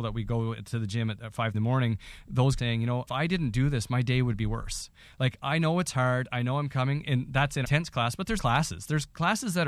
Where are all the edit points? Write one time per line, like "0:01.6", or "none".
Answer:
0:01.5
0:02.6
0:03.1
0:07.6
0:08.4